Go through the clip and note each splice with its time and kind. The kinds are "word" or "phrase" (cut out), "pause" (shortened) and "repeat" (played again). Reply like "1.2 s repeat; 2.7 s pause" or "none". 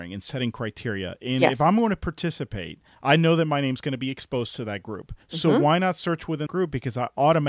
5.2 s pause; 6.5 s word